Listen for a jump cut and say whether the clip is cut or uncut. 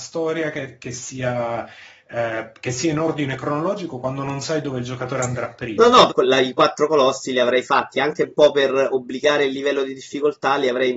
cut